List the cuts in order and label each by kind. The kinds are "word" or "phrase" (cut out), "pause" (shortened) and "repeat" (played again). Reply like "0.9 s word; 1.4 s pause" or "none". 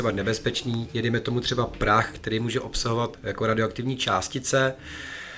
3.1 s word